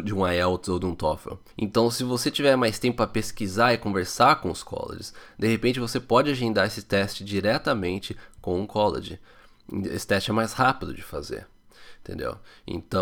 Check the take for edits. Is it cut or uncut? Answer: cut